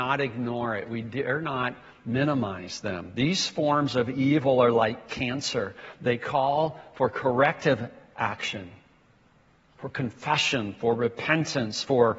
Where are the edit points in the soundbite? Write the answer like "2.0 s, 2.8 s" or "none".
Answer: none